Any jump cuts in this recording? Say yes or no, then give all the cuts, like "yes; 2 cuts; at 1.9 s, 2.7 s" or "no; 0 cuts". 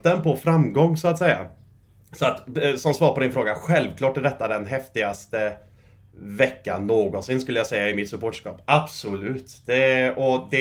no; 0 cuts